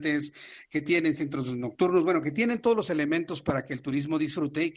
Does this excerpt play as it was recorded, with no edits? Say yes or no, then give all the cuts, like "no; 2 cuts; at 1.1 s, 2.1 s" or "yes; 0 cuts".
yes; 0 cuts